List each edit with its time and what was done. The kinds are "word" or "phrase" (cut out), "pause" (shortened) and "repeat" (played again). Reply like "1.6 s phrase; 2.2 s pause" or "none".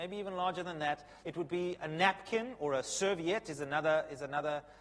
1.2 s pause